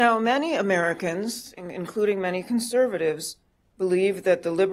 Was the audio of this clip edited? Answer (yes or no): no